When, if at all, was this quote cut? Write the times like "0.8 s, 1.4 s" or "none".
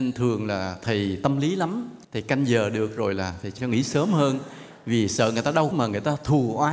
2.0 s, 3.6 s, 5.7 s